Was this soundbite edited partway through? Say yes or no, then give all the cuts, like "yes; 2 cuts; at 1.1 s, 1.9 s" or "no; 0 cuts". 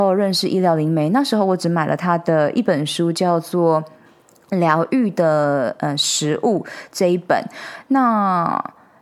no; 0 cuts